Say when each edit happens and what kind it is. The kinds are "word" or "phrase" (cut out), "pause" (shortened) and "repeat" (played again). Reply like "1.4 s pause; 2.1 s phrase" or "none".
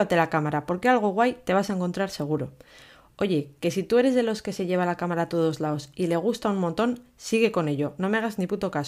none